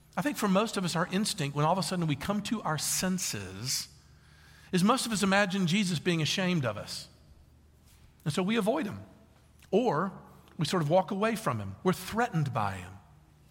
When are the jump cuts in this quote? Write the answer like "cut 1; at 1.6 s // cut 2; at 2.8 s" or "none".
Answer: none

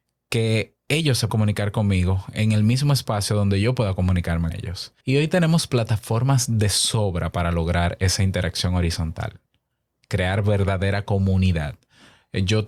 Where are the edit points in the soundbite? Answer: cut 1; at 1.3 s // cut 2; at 4.5 s // cut 3; at 5.0 s

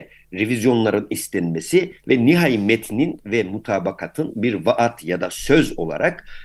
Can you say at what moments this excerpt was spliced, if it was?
none

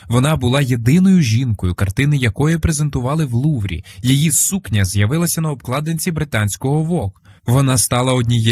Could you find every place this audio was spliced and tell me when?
none

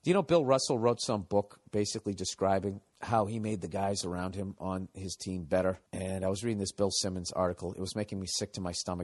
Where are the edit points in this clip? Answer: cut 1; at 2.9 s // cut 2; at 5.9 s

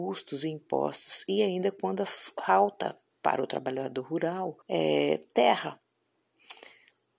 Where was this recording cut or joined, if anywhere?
cut 1; at 4.6 s

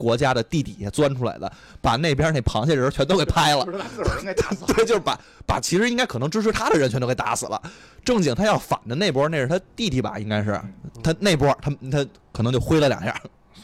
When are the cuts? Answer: none

